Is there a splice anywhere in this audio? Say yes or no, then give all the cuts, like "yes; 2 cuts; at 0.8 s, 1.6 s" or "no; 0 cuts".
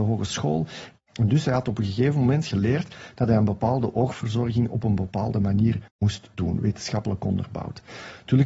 yes; 1 cut; at 5.9 s